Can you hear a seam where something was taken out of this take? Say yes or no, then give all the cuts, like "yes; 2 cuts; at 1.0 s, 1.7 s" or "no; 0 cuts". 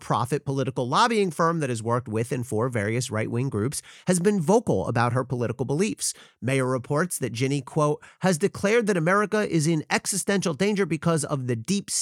no; 0 cuts